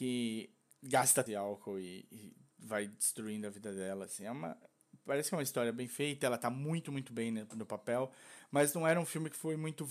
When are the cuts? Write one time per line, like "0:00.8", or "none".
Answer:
0:01.3